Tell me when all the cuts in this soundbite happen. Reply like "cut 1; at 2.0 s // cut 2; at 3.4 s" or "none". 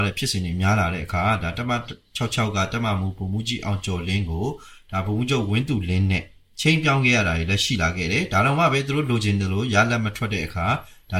none